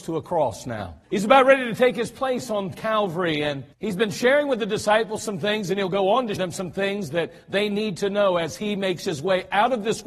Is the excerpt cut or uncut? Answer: cut